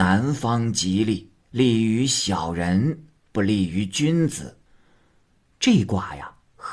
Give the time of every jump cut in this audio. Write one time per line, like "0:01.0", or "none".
0:01.4
0:04.7